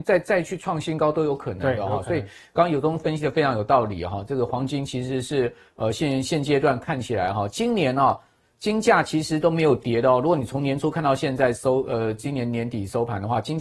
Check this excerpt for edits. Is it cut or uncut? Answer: uncut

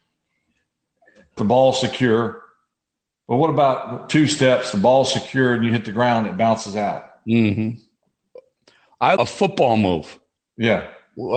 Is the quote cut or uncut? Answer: cut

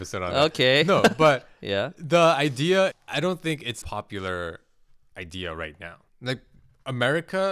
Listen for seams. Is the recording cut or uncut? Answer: cut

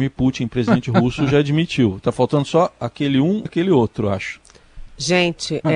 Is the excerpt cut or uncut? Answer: cut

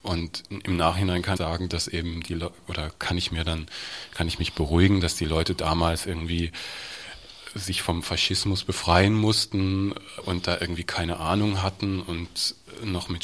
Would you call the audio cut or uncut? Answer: cut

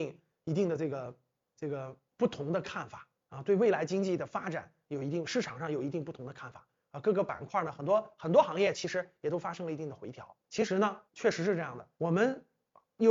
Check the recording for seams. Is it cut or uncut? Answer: cut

